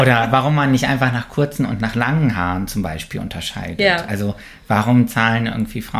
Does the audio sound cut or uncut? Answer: uncut